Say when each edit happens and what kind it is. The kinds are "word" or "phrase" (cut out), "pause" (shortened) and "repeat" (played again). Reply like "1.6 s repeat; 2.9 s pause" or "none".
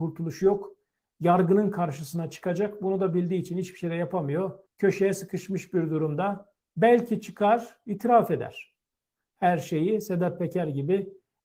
4.7 s pause